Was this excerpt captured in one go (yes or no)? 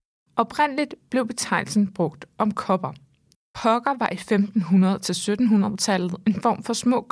yes